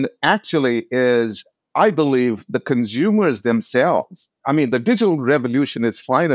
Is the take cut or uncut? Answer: uncut